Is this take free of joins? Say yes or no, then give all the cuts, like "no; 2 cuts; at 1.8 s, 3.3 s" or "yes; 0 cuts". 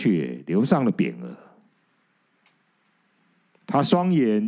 yes; 0 cuts